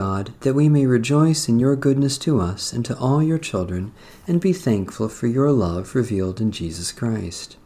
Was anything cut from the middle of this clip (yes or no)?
no